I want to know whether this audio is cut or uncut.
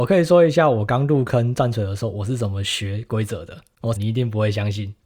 cut